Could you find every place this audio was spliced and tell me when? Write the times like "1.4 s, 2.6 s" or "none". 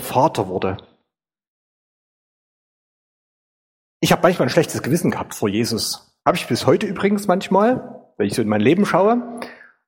6.2 s